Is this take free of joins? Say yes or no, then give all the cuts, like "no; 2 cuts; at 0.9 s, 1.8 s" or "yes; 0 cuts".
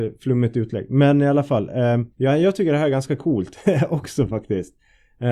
no; 1 cut; at 2.1 s